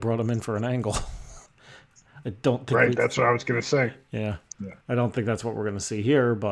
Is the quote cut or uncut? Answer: cut